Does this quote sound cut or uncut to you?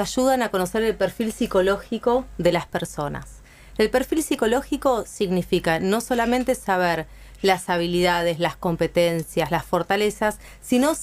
uncut